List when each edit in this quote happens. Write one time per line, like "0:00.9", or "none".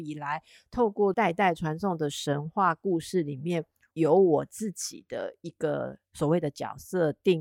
none